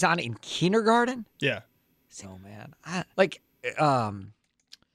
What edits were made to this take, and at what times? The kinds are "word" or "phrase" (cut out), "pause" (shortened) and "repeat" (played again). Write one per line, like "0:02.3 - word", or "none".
0:02.2 - phrase
0:03.1 - pause